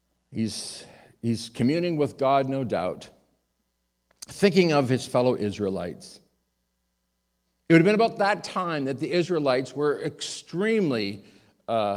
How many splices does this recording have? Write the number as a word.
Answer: zero